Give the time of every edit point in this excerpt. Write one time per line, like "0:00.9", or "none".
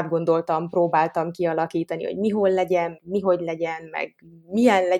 0:03.0